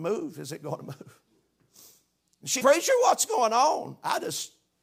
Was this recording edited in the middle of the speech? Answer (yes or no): yes